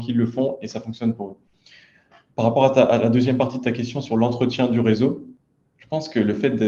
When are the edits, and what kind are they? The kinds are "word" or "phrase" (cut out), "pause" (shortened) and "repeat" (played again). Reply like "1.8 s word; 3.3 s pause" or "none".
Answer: none